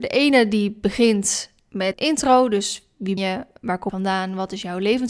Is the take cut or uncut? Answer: cut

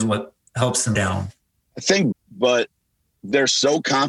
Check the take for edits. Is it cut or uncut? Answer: cut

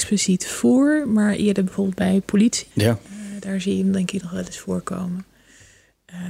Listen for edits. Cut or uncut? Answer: cut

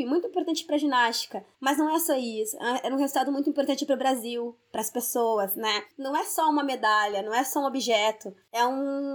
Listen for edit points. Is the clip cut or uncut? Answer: uncut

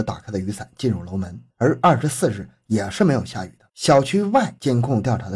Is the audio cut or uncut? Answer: cut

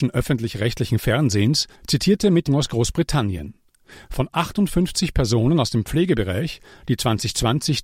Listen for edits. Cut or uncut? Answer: cut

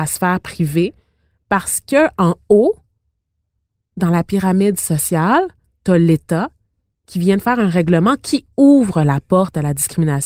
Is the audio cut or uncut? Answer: uncut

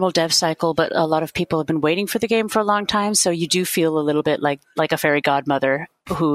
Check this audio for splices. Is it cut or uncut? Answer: uncut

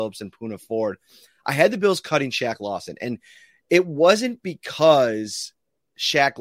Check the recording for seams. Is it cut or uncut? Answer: uncut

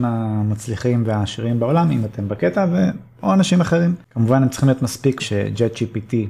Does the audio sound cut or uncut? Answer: cut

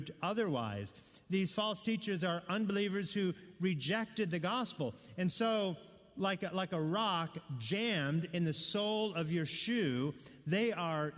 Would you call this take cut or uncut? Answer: uncut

